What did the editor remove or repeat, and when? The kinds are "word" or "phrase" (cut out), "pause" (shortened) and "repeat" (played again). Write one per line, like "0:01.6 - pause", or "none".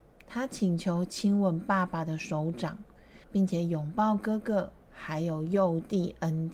0:03.2 - pause